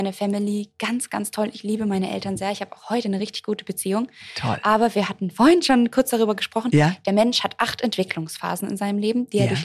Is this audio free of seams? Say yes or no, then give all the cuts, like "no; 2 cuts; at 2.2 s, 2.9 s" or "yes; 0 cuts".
yes; 0 cuts